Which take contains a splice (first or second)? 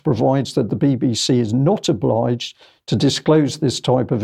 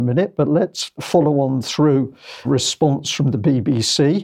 second